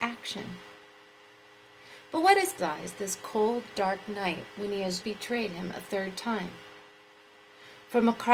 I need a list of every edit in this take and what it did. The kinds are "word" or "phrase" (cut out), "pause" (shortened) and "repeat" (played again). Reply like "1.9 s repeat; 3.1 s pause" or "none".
2.6 s phrase; 5.0 s word

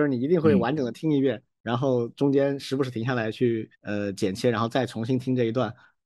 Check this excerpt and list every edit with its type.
3.8 s pause

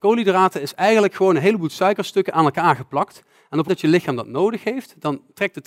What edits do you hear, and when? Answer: 3.7 s word

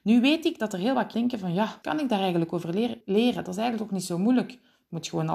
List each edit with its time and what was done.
1.1 s word; 1.8 s word; 3.0 s pause

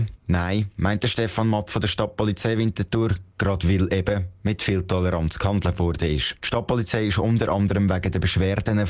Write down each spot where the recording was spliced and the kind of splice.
none

